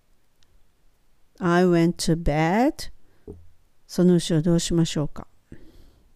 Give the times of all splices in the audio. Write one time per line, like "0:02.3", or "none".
none

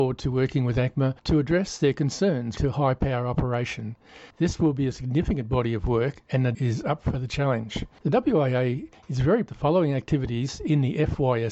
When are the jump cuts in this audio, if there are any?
0:01.2
0:02.6
0:04.3
0:06.5
0:09.5

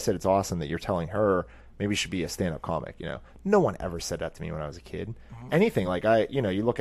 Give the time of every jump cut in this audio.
none

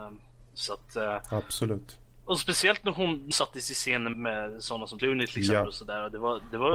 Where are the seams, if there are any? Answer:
0:03.3
0:04.1
0:05.0

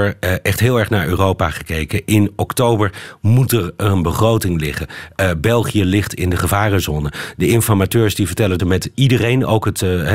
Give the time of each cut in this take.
0:08.6

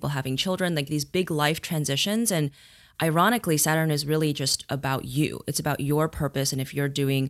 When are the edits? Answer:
none

